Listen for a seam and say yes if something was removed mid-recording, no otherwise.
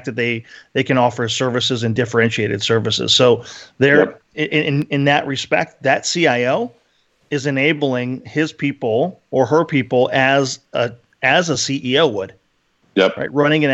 no